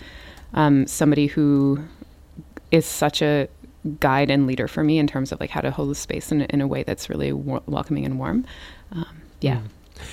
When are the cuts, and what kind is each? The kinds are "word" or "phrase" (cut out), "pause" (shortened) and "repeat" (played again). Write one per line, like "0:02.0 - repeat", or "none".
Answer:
0:02.6 - pause